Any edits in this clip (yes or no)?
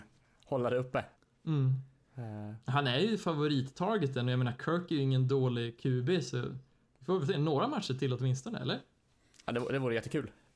yes